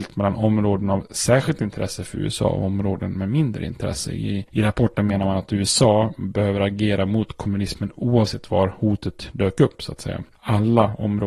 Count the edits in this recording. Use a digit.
0